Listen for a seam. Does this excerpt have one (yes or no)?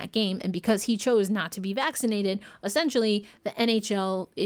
no